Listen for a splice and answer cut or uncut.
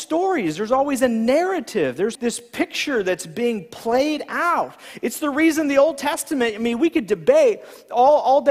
cut